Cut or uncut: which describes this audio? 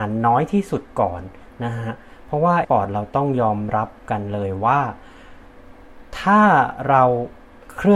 cut